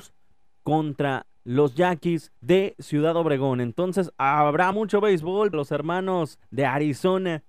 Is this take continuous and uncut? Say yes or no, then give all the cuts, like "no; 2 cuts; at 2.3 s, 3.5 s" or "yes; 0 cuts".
no; 5 cuts; at 1.4 s, 2.4 s, 4.7 s, 5.5 s, 6.4 s